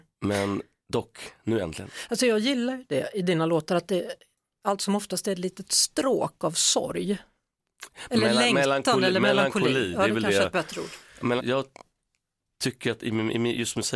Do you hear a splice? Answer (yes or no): yes